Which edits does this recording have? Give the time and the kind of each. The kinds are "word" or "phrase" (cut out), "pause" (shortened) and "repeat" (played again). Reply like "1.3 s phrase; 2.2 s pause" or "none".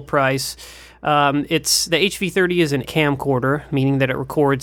1.9 s word; 2.8 s word